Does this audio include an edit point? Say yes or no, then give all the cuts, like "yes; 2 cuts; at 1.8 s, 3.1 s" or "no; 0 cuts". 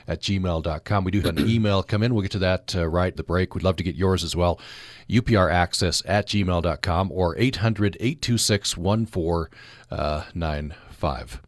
yes; 2 cuts; at 1.2 s, 3.2 s